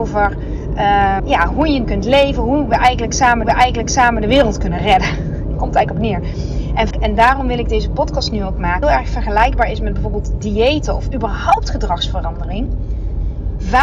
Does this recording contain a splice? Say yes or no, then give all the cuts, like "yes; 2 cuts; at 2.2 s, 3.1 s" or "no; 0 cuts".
yes; 5 cuts; at 1.2 s, 1.8 s, 3.4 s, 6.9 s, 8.8 s